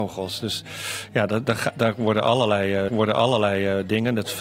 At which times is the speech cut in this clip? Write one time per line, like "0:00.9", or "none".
0:02.9